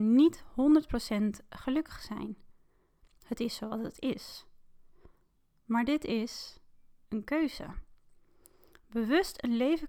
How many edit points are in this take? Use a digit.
0